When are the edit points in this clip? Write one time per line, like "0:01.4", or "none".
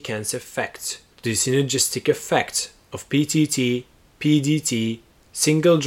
0:01.1